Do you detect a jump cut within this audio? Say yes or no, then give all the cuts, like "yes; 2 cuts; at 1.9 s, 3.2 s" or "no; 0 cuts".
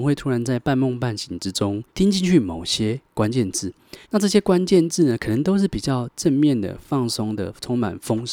yes; 2 cuts; at 1.9 s, 4.0 s